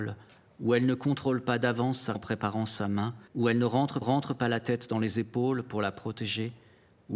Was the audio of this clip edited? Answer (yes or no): yes